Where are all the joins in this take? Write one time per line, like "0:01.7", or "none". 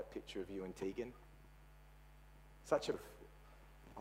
0:02.9

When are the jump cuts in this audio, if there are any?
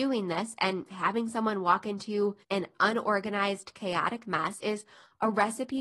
0:02.4

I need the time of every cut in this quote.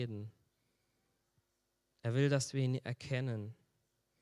none

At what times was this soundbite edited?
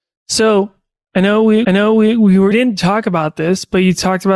0:01.6
0:02.5

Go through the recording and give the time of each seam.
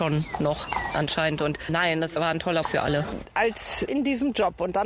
0:02.6
0:03.9

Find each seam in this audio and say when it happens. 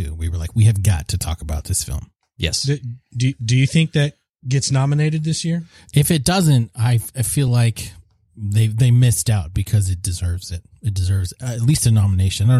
none

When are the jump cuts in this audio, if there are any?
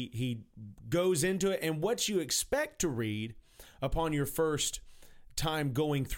none

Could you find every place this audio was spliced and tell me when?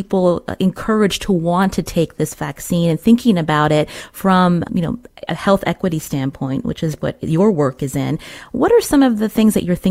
0:04.7

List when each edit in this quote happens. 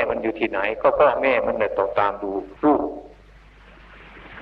0:02.6

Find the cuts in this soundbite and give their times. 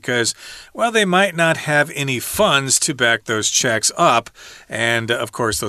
none

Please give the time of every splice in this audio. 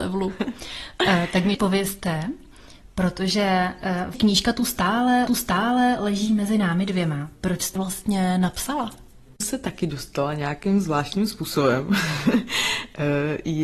0:01.5
0:04.1
0:05.3
0:07.8
0:09.4

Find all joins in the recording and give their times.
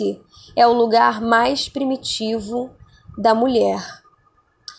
none

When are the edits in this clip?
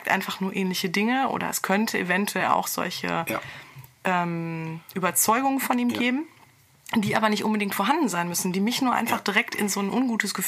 none

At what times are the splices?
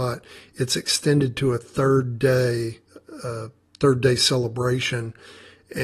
0:03.7

